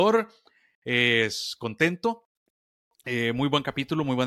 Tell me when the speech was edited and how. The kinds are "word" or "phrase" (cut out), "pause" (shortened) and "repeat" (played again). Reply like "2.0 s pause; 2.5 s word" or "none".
none